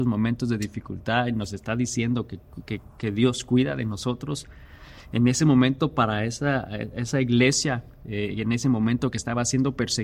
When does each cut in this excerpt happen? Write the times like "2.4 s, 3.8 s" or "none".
none